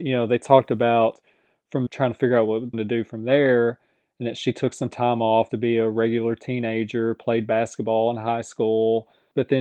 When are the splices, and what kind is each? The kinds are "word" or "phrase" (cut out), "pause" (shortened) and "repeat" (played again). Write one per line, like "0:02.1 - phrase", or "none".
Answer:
0:01.9 - word
0:02.7 - phrase
0:05.5 - word